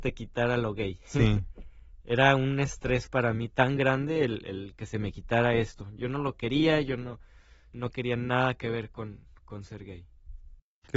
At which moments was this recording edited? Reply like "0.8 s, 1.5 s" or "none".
none